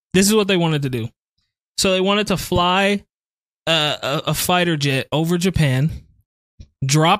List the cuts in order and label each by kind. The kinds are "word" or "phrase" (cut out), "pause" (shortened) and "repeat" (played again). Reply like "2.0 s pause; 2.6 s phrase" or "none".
none